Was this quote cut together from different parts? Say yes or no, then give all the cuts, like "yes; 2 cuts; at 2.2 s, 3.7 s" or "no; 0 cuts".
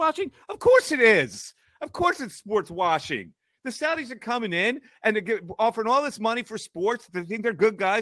no; 0 cuts